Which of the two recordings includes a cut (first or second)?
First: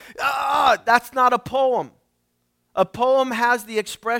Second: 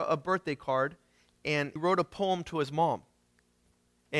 second